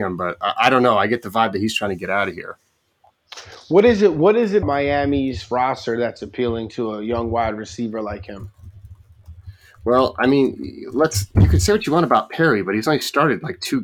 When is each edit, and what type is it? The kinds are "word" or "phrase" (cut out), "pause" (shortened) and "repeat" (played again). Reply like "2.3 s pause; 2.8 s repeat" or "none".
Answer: 4.6 s word; 11.3 s word